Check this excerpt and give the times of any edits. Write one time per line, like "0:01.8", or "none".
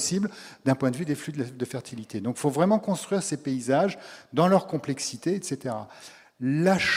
none